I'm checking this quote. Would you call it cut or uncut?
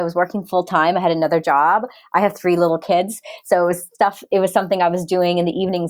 uncut